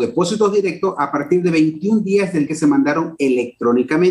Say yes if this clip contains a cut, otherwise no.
yes